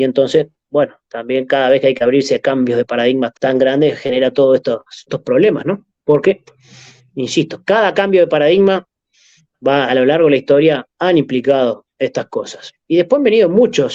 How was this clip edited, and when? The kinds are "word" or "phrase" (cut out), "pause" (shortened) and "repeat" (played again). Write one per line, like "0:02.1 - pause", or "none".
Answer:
0:03.3 - word
0:05.1 - word
0:09.9 - word